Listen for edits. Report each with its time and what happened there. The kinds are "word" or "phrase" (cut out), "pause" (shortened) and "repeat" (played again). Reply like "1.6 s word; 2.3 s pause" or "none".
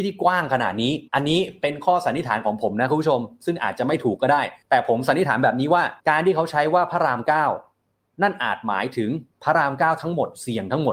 1.1 s pause; 4.6 s pause; 6.0 s pause; 9.3 s pause